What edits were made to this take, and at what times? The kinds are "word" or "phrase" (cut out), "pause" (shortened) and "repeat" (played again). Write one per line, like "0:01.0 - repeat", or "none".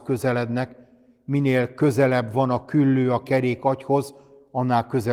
none

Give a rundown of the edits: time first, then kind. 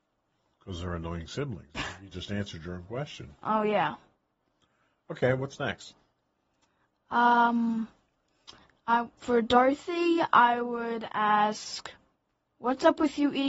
none

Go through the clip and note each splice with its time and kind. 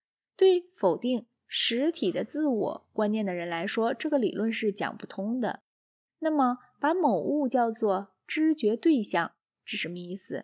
none

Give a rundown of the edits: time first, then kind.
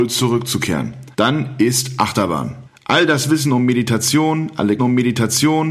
0:01.1 - pause
0:02.7 - pause
0:04.8 - repeat

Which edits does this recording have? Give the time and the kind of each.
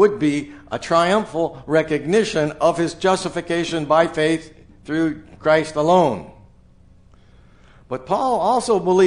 none

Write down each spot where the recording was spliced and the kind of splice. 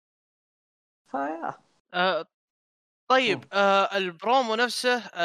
none

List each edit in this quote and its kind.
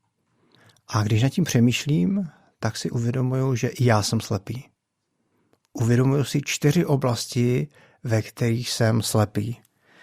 none

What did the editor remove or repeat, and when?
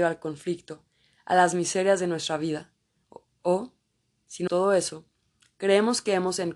0:04.5 - word

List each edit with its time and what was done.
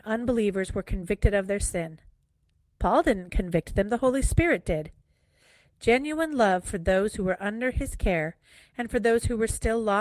none

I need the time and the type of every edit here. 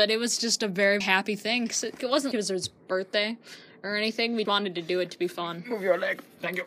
0:01.0 - word
0:02.0 - word
0:02.3 - word
0:04.5 - word

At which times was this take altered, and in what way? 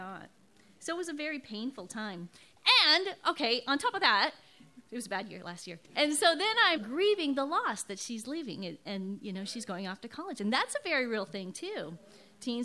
0:05.8 - pause
0:06.8 - word

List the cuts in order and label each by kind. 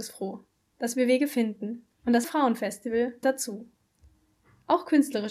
0:01.9 - pause
0:02.2 - word
0:03.2 - word

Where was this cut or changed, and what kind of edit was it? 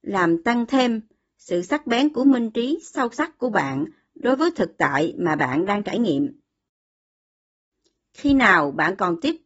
none

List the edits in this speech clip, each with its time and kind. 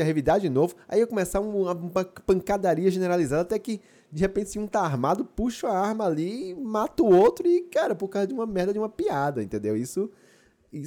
none

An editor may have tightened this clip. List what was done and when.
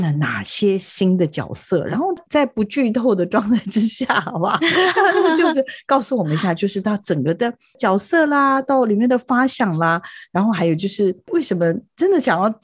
none

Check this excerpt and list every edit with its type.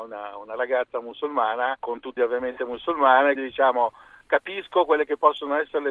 0:01.8 - pause
0:02.2 - phrase
0:03.4 - word

